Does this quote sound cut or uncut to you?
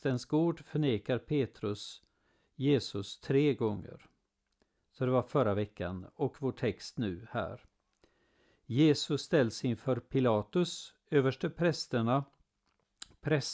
uncut